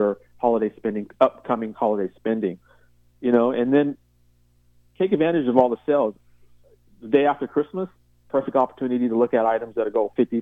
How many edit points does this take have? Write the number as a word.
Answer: zero